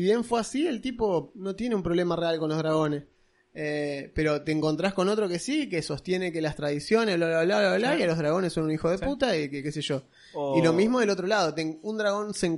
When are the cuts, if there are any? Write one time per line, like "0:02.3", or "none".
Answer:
none

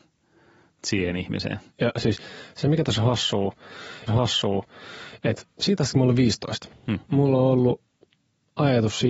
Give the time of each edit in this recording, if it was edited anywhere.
0:01.7
0:04.1
0:07.0

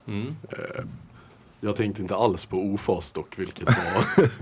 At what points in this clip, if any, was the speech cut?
none

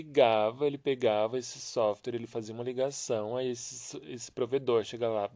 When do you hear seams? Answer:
none

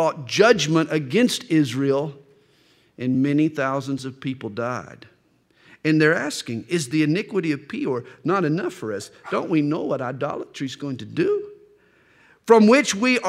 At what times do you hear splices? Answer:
none

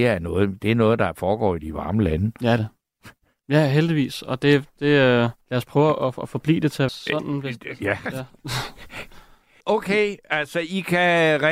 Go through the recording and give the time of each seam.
0:02.6
0:05.4
0:06.9
0:09.6

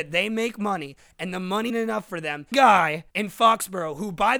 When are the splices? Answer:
0:01.7
0:02.5
0:03.1

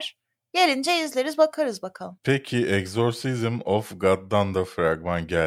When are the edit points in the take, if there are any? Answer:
none

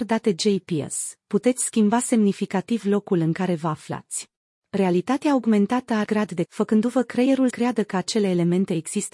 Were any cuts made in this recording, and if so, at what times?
0:04.5
0:06.0
0:06.4
0:07.5

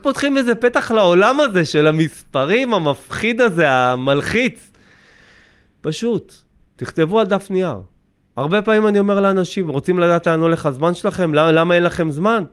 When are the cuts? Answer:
none

